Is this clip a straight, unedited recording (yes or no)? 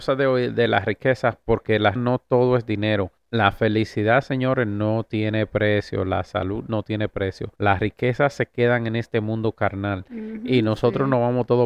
no